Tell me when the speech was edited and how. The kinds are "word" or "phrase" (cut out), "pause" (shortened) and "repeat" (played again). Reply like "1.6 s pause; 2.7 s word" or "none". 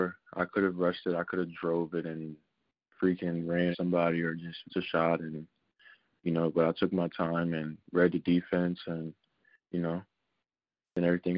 3.7 s word; 4.7 s word